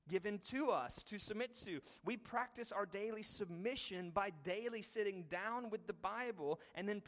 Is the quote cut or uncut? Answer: uncut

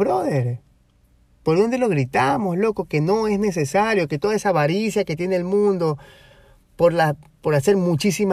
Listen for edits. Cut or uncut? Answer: uncut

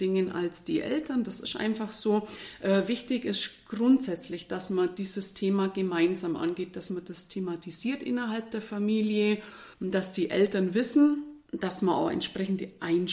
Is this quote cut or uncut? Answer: cut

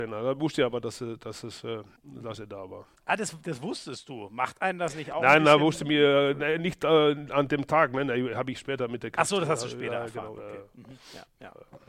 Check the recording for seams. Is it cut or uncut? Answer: cut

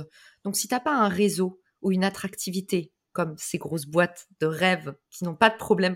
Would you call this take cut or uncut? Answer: uncut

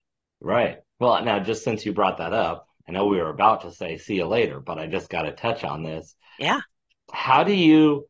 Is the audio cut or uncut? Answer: uncut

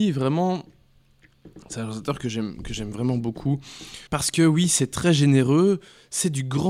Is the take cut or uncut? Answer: cut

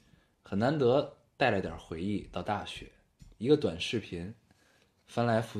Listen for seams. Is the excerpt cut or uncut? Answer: cut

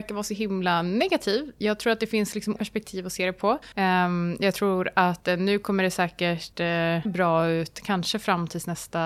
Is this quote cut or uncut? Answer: cut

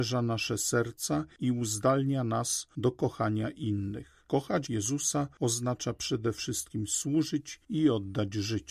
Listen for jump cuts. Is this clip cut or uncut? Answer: cut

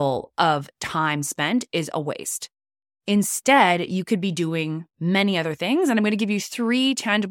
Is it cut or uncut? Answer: uncut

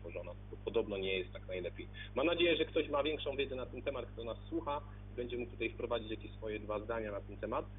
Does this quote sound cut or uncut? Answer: uncut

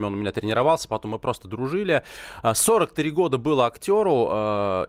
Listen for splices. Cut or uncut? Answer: uncut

